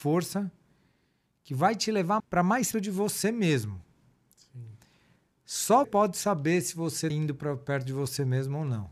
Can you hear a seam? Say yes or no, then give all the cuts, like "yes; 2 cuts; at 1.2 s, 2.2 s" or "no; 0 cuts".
yes; 4 cuts; at 2.2 s, 2.7 s, 5.8 s, 7.1 s